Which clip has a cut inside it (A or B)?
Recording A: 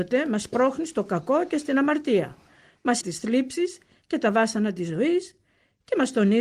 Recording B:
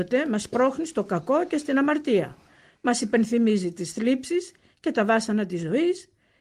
A